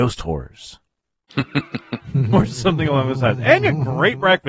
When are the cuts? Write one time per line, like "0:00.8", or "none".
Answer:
none